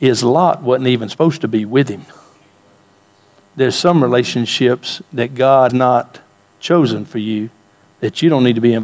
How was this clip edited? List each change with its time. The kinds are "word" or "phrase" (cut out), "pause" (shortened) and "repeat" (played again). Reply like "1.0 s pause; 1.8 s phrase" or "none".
5.7 s word